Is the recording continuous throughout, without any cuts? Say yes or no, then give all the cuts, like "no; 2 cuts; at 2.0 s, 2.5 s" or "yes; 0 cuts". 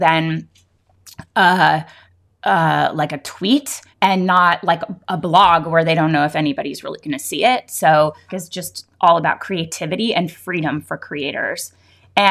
no; 2 cuts; at 3.9 s, 8.3 s